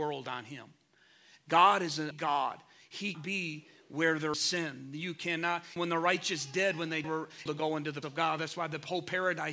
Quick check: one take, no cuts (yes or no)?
no